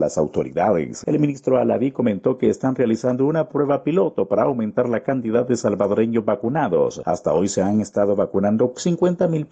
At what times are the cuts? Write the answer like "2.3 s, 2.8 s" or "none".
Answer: none